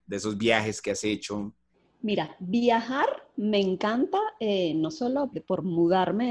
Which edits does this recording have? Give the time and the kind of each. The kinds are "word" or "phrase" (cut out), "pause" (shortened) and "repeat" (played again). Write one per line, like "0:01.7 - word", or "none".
0:01.7 - pause
0:05.3 - word